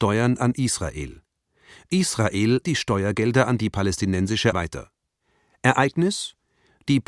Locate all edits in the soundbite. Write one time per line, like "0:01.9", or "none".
0:02.6
0:04.5